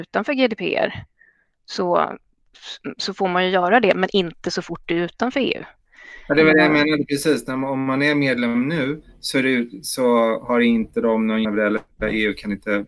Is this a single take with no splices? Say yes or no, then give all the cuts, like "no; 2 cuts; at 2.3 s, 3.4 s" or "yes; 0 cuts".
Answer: no; 1 cut; at 11.4 s